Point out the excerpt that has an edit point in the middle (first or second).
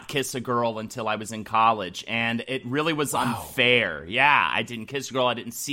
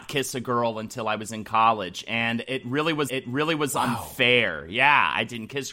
second